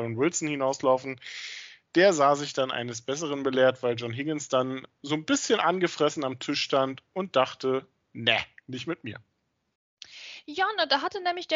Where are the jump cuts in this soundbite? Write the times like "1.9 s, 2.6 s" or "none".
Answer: none